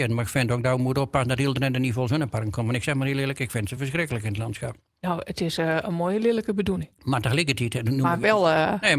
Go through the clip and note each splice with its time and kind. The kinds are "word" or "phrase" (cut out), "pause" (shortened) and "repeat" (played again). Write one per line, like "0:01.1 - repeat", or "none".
none